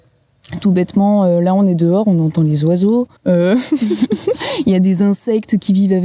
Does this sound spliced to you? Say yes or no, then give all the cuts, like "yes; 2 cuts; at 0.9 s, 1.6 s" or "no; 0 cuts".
yes; 1 cut; at 3.2 s